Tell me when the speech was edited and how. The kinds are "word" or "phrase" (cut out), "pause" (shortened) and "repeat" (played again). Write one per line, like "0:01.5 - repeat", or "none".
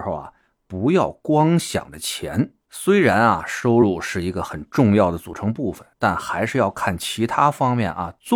0:02.6 - pause
0:05.9 - pause

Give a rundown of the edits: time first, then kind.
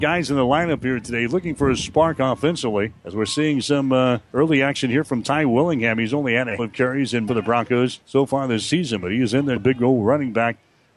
0:03.0 - pause
0:04.2 - pause
0:06.6 - word
0:07.3 - phrase
0:08.0 - pause
0:09.6 - word

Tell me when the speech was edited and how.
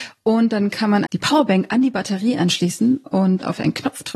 0:01.1 - word

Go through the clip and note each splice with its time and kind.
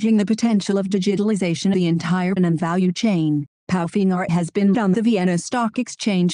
0:01.7 - word
0:02.4 - word
0:04.3 - word
0:04.7 - word

